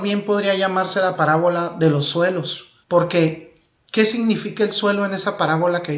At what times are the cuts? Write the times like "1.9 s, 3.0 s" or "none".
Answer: 2.8 s